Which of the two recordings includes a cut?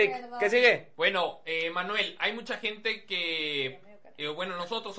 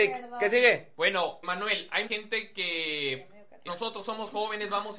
second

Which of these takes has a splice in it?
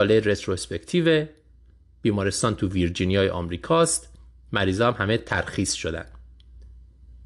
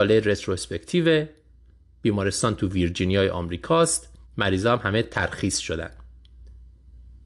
second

